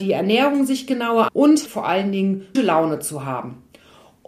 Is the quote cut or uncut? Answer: cut